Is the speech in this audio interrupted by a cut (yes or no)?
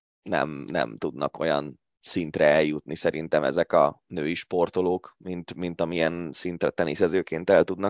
no